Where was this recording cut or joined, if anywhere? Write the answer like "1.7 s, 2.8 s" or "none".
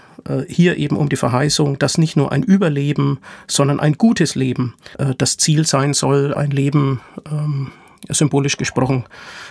4.9 s, 6.3 s